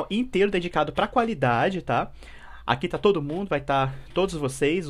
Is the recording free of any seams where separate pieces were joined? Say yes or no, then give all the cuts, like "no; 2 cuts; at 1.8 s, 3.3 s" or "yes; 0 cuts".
yes; 0 cuts